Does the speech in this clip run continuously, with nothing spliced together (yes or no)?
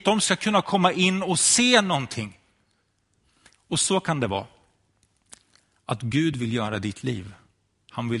yes